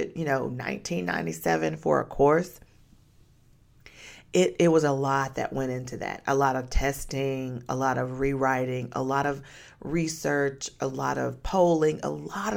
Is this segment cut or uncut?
uncut